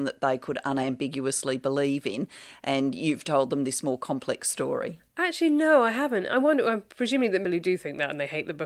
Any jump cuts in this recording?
yes; 1 cut; at 7.4 s

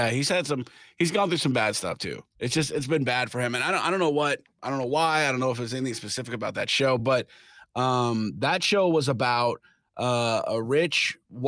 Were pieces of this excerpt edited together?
no; 0 cuts

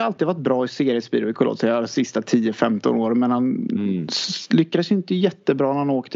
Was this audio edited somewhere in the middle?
no; 0 cuts

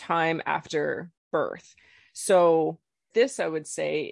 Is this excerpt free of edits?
no; 2 cuts; at 1.2 s, 3.1 s

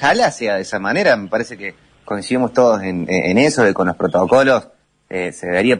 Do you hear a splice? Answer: no; 0 cuts

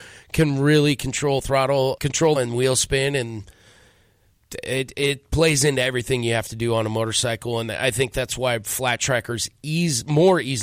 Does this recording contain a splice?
yes; 2 cuts; at 2.0 s, 2.4 s

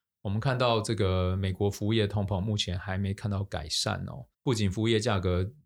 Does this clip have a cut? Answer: yes; 1 cut; at 4.3 s

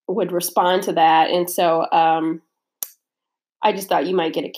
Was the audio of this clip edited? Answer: no; 0 cuts

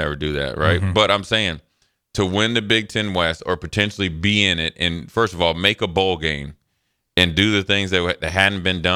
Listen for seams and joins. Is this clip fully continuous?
yes; 0 cuts

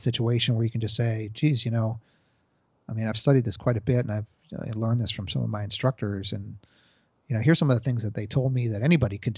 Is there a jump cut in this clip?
no; 0 cuts

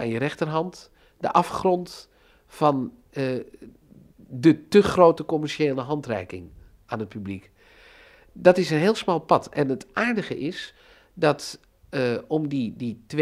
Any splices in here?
no; 0 cuts

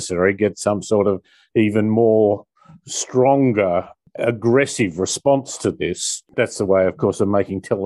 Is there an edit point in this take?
no; 0 cuts

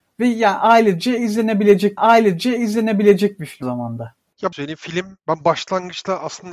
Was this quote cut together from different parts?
yes; 4 cuts; at 2.0 s, 3.6 s, 4.5 s, 5.2 s

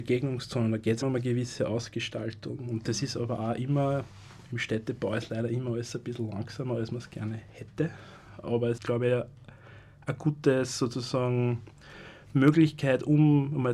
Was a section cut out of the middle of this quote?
yes; 2 cuts; at 1.0 s, 8.8 s

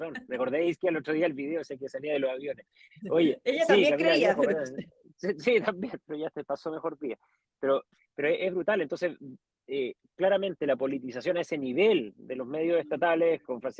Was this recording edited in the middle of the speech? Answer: no; 0 cuts

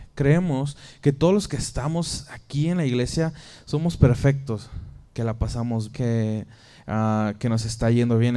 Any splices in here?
yes; 2 cuts; at 5.1 s, 5.9 s

